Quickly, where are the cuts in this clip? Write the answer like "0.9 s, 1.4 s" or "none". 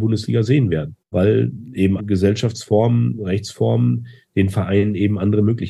1.0 s, 2.0 s